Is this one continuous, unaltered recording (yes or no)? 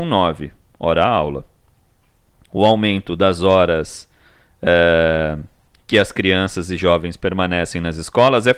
yes